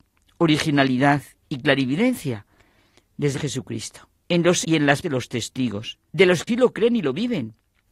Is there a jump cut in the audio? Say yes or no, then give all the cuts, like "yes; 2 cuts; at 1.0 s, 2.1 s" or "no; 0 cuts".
yes; 6 cuts; at 3.3 s, 4.2 s, 4.6 s, 5.0 s, 6.1 s, 6.5 s